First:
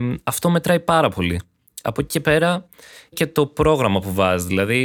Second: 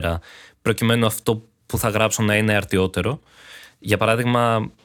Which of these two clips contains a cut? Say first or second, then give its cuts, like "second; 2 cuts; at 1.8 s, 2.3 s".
first; 1 cut; at 3.1 s